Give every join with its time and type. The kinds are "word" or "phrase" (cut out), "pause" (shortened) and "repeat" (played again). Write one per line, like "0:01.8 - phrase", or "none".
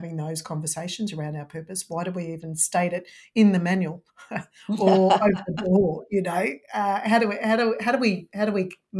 0:04.1 - pause